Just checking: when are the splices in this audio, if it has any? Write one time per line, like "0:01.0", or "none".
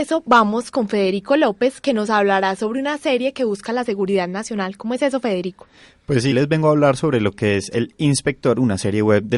0:06.3